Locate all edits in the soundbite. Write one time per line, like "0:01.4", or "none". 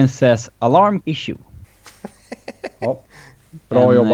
0:01.0
0:01.6